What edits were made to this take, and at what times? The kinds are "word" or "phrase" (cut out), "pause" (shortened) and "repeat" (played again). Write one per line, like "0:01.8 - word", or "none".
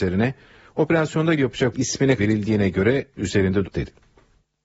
0:01.4 - word
0:01.7 - word
0:02.2 - word
0:03.2 - word
0:03.6 - word

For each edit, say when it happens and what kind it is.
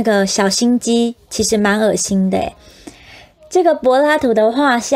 none

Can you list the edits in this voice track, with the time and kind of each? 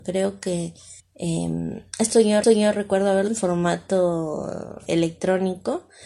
0:01.0 - pause
0:02.4 - repeat
0:03.3 - word
0:04.9 - word

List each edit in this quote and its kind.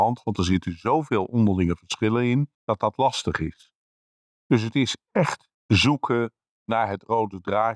0:02.5 - pause
0:05.5 - pause

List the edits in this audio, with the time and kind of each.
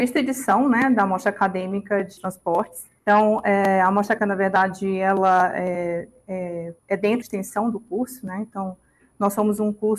0:02.2 - phrase
0:03.0 - pause
0:04.2 - word
0:06.8 - pause
0:07.2 - phrase

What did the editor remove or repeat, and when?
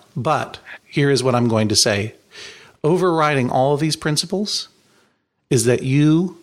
none

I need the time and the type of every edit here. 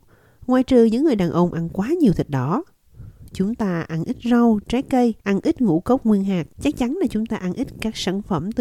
0:05.2 - pause
0:06.5 - pause

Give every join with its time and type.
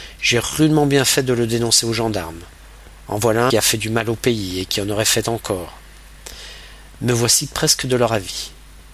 0:03.5 - phrase

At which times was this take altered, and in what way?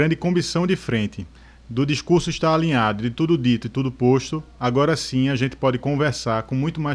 none

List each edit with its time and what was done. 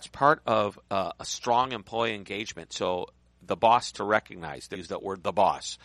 0:03.9 - word
0:04.7 - word

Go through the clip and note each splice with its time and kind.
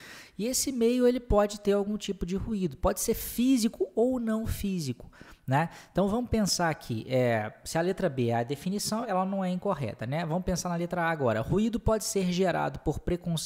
0:09.0 - word

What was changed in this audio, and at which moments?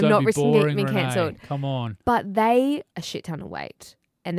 0:02.9 - word

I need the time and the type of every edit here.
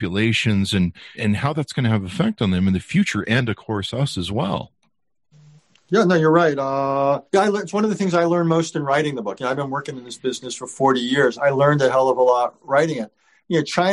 0:01.1 - word
0:07.3 - pause
0:11.4 - word

